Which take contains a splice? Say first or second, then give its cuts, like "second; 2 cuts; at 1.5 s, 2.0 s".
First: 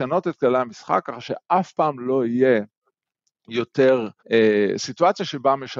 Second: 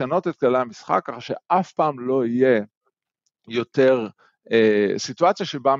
first; 1 cut; at 4.2 s